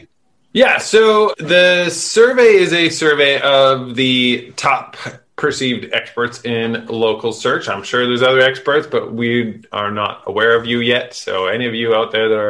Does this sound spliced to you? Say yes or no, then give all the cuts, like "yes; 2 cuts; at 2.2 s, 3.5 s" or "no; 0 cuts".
yes; 1 cut; at 1.3 s